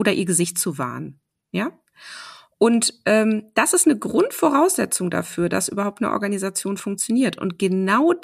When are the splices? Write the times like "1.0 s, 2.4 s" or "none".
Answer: none